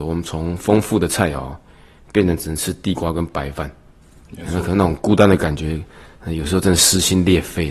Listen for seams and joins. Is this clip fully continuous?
yes; 0 cuts

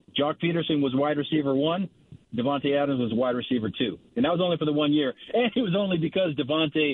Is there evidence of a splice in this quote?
no; 0 cuts

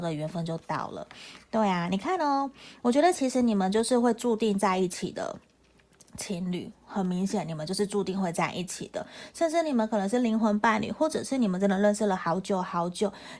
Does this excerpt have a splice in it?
no; 0 cuts

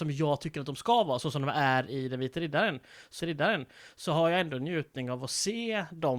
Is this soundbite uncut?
no; 1 cut; at 3.2 s

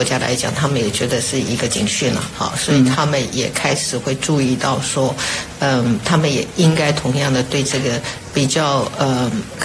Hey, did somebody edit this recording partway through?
no; 0 cuts

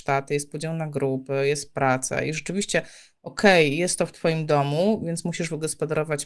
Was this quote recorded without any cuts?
yes; 0 cuts

